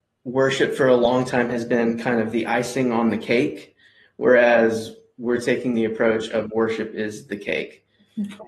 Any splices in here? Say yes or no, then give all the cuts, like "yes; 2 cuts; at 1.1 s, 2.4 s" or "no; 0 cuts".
no; 0 cuts